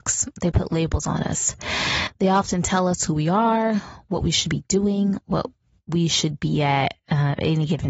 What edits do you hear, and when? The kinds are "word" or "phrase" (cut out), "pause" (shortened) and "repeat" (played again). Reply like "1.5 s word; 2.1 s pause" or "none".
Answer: none